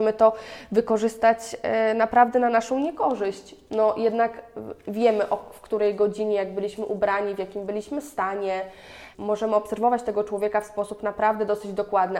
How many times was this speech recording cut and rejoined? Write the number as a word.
zero